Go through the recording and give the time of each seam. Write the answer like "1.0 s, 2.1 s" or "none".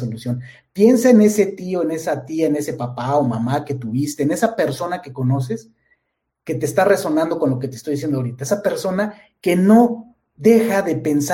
none